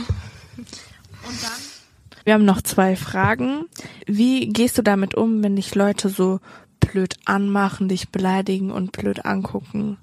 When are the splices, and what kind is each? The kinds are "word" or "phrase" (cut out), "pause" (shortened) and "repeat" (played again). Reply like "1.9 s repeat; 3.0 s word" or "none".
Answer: 2.2 s pause; 4.0 s pause